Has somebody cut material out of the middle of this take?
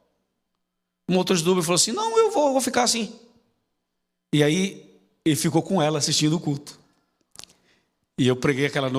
no; 0 cuts

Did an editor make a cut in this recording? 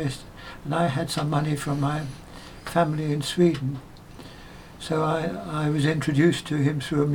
no; 0 cuts

